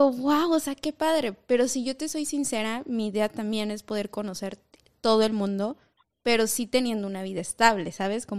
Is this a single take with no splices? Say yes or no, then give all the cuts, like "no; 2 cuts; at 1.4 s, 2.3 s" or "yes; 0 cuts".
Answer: yes; 0 cuts